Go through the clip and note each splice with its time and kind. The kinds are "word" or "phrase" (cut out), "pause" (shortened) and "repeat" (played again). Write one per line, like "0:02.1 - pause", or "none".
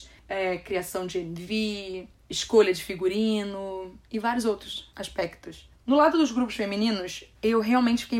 0:05.8 - pause

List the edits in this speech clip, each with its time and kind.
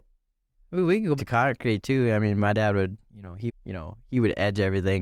0:01.2 - word
0:03.5 - word

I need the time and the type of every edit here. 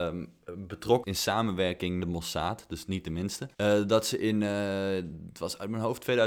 0:01.0 - word
0:02.0 - phrase
0:03.5 - pause

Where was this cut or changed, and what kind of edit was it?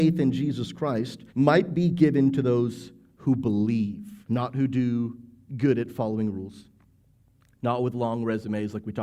0:01.3 - pause
0:04.2 - pause

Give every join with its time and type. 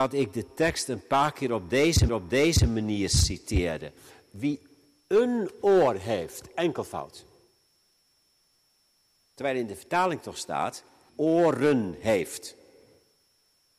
0:02.1 - repeat
0:11.1 - word

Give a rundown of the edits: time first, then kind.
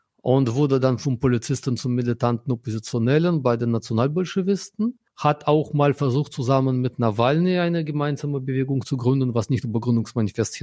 0:05.1 - pause

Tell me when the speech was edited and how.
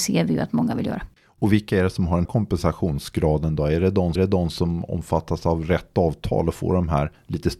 0:01.2 - pause
0:02.2 - word
0:04.2 - repeat

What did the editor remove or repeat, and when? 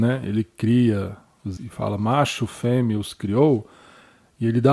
0:01.6 - word

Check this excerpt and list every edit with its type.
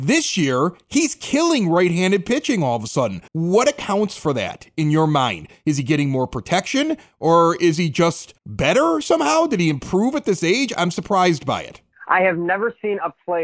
0:03.3 - pause
0:08.4 - pause

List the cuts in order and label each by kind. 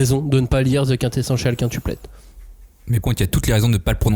0:03.0 - word

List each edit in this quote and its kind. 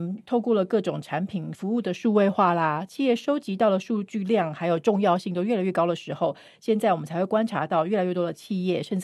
none

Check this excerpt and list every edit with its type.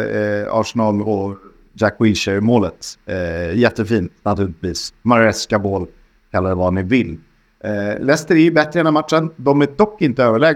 none

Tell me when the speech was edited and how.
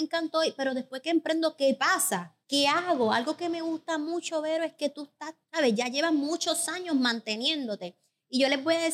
0:02.4 - pause
0:05.4 - pause

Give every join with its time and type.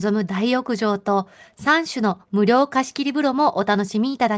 none

